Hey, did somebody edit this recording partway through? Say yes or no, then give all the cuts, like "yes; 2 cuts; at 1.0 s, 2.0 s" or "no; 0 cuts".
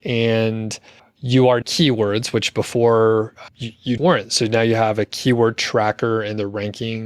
yes; 4 cuts; at 1.0 s, 1.6 s, 3.5 s, 4.0 s